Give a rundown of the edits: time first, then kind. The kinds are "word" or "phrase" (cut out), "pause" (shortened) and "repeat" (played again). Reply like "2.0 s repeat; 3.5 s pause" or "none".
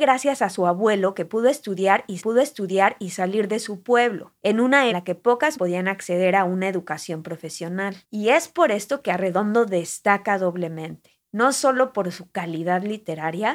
2.2 s repeat; 4.4 s pause; 4.9 s phrase; 5.5 s word; 8.0 s pause; 11.3 s pause